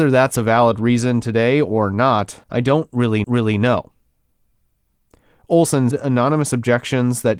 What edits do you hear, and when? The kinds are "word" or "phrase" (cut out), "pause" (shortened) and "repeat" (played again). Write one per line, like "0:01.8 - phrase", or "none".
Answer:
0:02.4 - pause
0:03.2 - repeat
0:05.9 - word